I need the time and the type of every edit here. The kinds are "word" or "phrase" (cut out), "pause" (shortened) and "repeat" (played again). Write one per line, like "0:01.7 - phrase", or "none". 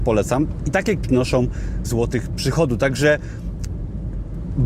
0:01.0 - word
0:01.8 - word